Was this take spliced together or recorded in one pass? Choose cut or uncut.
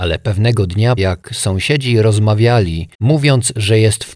cut